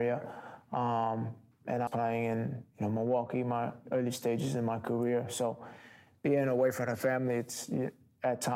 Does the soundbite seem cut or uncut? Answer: cut